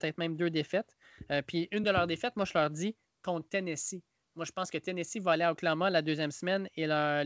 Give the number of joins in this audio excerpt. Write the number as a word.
zero